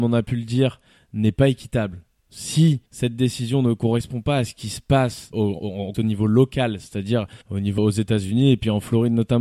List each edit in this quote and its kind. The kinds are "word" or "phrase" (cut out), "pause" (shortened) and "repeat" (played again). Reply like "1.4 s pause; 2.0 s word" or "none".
2.9 s pause; 5.3 s phrase; 5.9 s word; 7.4 s pause; 7.8 s word